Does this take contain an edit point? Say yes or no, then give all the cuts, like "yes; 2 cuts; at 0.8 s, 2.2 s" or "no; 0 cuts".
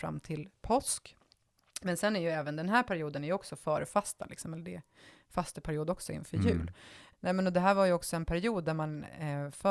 no; 0 cuts